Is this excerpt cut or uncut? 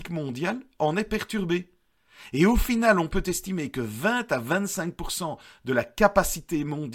uncut